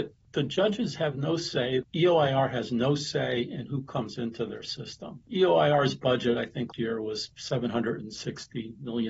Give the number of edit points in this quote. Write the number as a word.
one